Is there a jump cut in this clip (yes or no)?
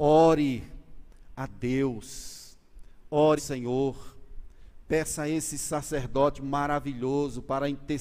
yes